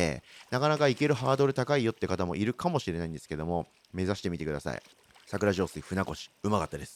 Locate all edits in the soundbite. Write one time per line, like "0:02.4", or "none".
0:04.9